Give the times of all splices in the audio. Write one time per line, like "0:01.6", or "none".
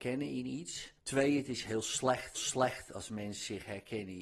0:01.0
0:02.3

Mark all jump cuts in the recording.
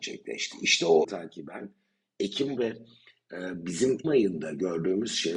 0:01.0
0:02.6
0:04.0

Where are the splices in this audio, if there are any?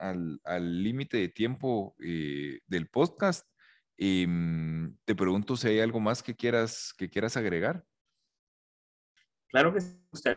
none

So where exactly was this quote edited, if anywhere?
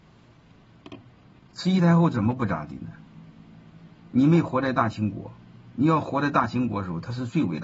none

